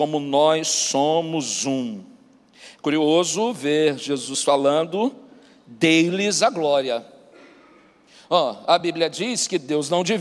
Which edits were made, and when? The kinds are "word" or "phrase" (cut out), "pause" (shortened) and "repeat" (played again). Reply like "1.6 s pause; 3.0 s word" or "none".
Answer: none